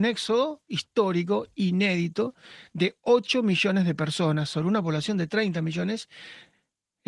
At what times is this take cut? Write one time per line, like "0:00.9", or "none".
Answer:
none